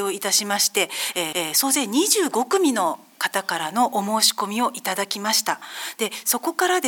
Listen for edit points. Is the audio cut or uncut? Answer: cut